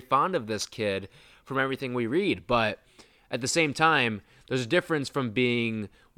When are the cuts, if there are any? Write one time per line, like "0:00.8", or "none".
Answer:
none